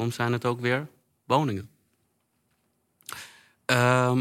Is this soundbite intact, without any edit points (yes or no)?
yes